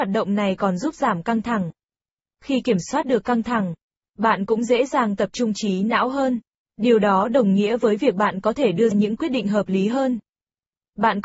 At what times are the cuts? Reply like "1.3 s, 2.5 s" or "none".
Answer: 8.9 s